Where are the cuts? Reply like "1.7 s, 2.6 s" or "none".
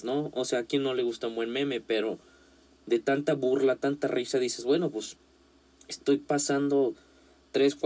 none